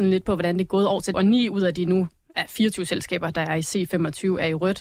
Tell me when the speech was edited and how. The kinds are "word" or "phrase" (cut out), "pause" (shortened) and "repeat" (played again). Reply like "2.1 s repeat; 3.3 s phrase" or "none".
1.1 s word